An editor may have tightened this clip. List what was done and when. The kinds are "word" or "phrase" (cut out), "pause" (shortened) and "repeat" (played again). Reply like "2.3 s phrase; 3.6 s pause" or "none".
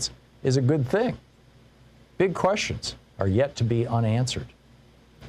none